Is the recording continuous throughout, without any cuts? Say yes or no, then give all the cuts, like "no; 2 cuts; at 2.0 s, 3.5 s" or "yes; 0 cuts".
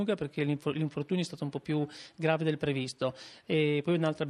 yes; 0 cuts